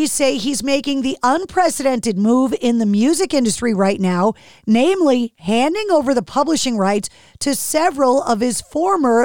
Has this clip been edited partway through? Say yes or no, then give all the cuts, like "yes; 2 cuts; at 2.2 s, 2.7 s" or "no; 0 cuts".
no; 0 cuts